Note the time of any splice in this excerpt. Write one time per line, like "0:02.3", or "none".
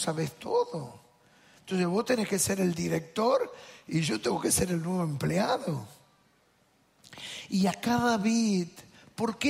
none

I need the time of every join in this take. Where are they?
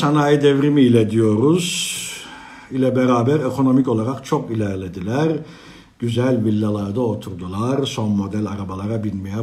none

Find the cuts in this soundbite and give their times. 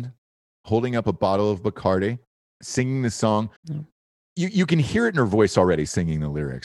0:02.6
0:03.6

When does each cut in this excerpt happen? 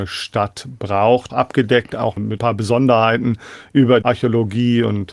0:01.3
0:02.4
0:04.0

